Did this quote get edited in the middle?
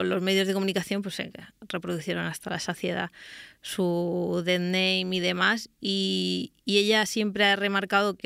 no; 0 cuts

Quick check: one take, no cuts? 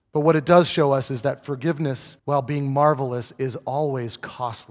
no; 1 cut; at 2.2 s

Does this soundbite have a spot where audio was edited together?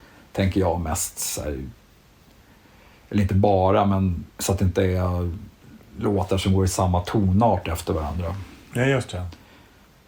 yes; 1 cut; at 4.3 s

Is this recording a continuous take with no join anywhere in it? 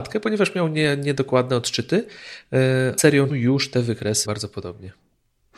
no; 3 cuts; at 3.0 s, 3.3 s, 4.2 s

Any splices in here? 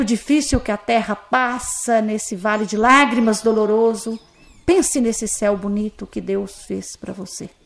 no; 0 cuts

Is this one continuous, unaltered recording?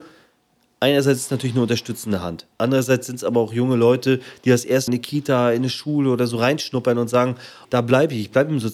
no; 3 cuts; at 2.5 s, 4.9 s, 7.6 s

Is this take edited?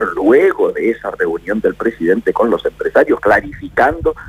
no; 0 cuts

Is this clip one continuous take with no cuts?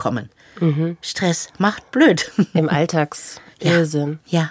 yes; 0 cuts

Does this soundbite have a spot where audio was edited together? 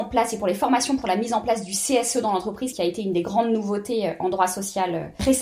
no; 0 cuts

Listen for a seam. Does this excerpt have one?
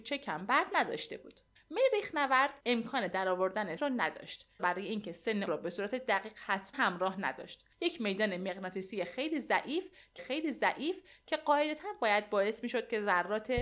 yes; 8 cuts; at 1.6 s, 2.6 s, 3.8 s, 4.6 s, 5.5 s, 6.7 s, 7.7 s, 10.2 s

